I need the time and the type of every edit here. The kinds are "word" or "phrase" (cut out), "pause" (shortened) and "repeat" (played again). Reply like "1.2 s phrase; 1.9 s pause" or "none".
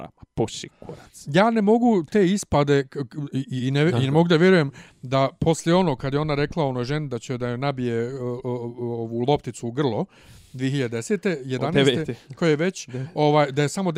none